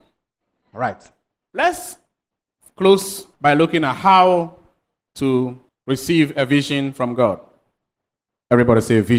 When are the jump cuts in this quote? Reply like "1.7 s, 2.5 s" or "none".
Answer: 3.3 s, 5.7 s